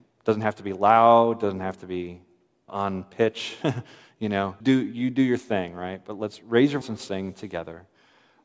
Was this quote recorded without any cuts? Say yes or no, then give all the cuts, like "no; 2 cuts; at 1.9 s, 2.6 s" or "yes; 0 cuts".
no; 3 cuts; at 2.7 s, 4.6 s, 6.8 s